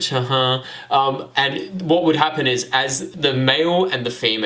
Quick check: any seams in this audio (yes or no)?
no